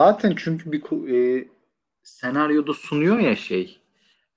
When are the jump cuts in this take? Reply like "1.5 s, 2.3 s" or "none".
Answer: none